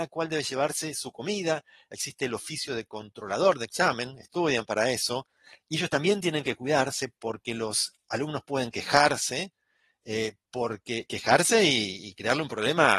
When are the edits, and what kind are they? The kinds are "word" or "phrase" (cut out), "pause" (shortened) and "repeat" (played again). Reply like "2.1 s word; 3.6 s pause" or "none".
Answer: none